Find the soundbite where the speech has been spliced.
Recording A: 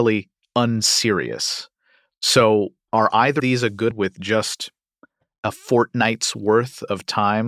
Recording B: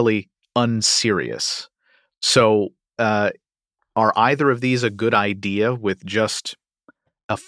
A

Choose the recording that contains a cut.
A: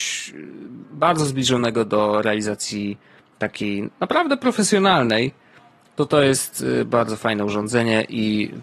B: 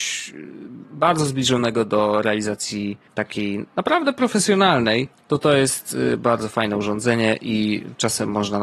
B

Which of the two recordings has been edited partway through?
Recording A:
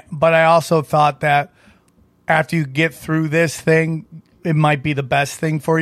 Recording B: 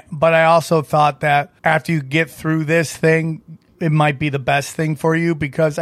B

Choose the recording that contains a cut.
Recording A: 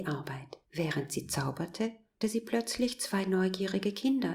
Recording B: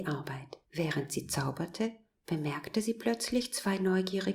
A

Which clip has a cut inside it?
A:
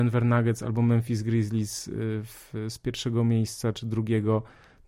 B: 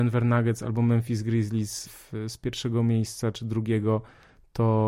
B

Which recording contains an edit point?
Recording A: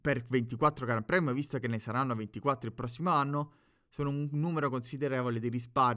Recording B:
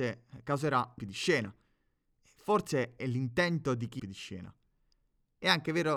B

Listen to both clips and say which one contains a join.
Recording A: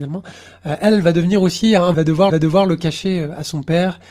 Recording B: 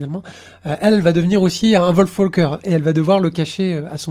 A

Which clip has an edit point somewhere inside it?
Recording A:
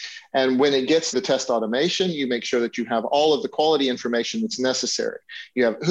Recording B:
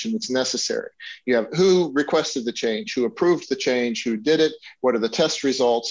A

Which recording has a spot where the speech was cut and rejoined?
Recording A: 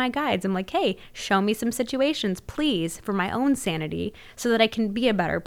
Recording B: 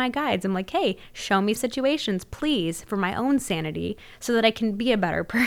B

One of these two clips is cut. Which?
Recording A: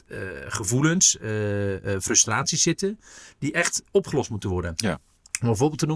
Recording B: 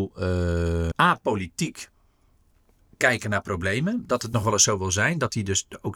B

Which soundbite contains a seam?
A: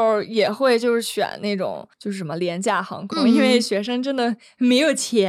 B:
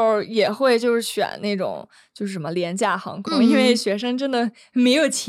A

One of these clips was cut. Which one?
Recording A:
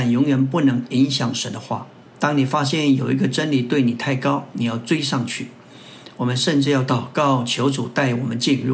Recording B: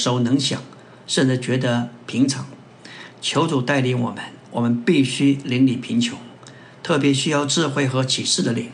A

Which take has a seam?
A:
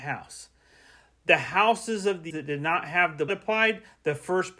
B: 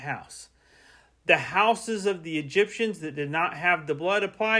A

